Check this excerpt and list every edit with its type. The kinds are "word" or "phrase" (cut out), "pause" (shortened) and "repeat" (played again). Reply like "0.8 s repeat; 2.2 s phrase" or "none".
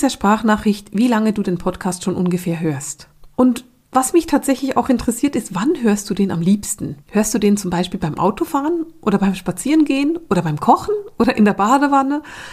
3.3 s pause; 7.0 s pause